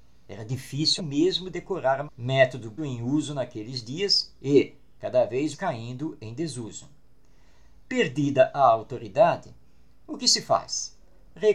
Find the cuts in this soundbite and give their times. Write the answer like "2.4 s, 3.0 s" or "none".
1.0 s, 2.1 s, 2.8 s, 5.0 s, 5.5 s